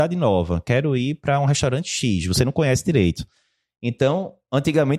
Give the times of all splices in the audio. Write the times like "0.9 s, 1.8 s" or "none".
none